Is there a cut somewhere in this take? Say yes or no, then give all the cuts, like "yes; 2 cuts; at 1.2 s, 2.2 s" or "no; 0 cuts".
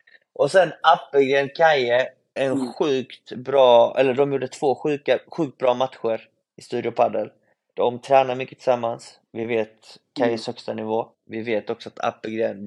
yes; 3 cuts; at 2.4 s, 9.3 s, 11.1 s